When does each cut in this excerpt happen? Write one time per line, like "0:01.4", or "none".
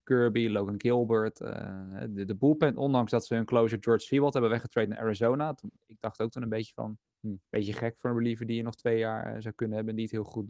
0:05.8
0:07.4